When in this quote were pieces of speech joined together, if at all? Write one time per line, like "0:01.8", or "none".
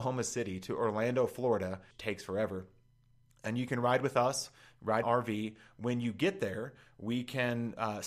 0:01.9
0:05.0

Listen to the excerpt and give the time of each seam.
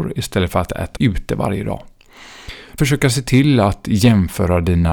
0:01.0
0:02.8

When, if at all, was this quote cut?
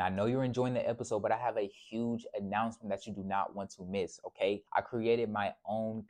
0:04.7

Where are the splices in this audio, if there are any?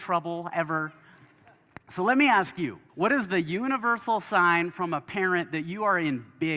0:02.9

